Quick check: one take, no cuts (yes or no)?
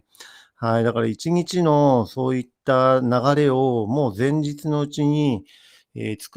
yes